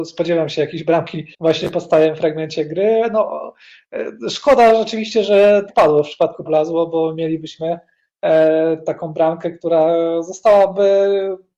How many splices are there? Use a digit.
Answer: 3